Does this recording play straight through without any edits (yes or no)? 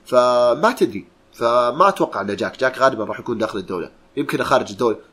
no